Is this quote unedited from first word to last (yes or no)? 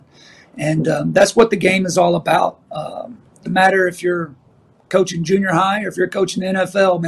no